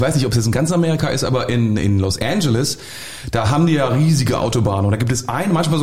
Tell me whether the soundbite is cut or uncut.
uncut